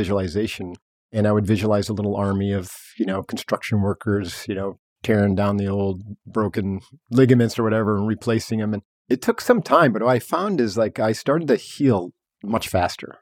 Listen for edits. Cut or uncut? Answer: uncut